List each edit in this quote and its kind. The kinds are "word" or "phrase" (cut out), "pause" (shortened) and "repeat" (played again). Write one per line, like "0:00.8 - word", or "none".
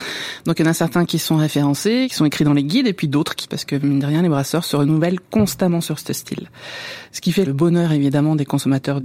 0:03.4 - word